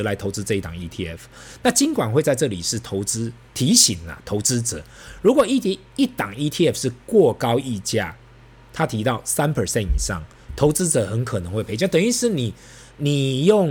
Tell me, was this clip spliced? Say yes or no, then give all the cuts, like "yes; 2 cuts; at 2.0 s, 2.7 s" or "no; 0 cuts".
no; 0 cuts